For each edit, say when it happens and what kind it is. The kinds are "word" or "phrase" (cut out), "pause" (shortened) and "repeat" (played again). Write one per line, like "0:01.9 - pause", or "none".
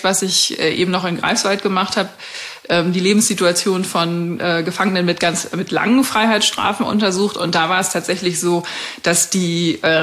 none